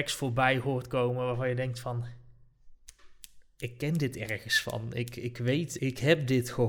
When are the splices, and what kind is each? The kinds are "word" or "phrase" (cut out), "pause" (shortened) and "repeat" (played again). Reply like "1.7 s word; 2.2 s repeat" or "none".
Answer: 5.8 s word